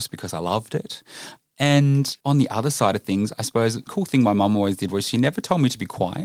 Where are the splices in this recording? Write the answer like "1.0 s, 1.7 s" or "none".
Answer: 2.2 s, 3.9 s